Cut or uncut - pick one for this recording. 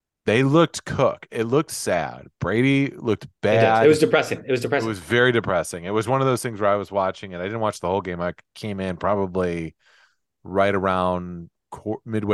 uncut